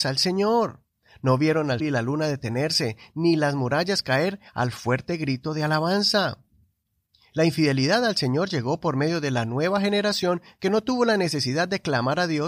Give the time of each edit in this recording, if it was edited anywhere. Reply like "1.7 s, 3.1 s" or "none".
1.8 s